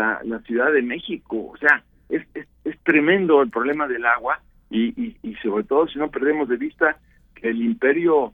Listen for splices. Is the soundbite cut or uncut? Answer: cut